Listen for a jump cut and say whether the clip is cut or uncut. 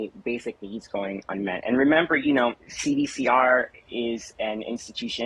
cut